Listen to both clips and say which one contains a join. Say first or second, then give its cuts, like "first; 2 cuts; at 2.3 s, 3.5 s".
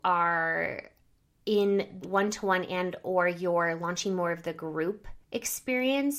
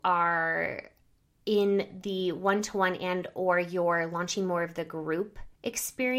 first; 1 cut; at 2.0 s